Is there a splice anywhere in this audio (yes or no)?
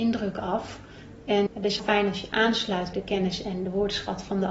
yes